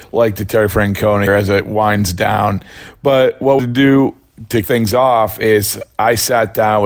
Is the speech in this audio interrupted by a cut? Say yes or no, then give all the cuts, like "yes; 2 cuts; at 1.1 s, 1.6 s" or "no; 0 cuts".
yes; 3 cuts; at 1.3 s, 3.6 s, 4.6 s